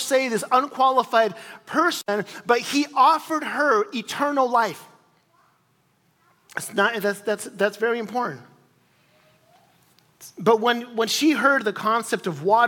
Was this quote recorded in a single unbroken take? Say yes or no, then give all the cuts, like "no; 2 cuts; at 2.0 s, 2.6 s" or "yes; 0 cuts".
yes; 0 cuts